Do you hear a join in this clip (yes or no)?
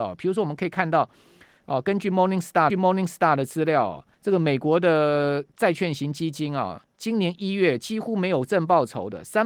yes